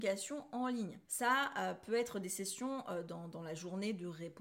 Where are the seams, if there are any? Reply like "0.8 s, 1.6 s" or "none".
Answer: 1.0 s